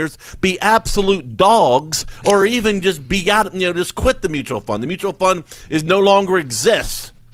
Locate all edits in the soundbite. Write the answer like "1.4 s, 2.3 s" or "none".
none